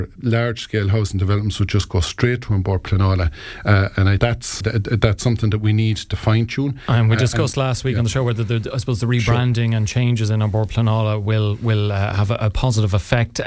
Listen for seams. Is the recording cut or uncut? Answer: cut